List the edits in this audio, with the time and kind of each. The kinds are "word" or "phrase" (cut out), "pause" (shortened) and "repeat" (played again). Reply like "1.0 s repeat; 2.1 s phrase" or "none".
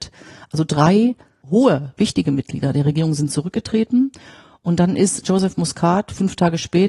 none